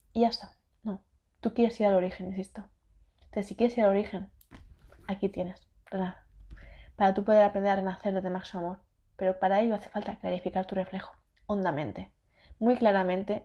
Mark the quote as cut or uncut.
uncut